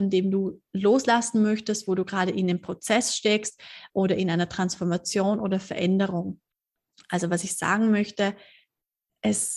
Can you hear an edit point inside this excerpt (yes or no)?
no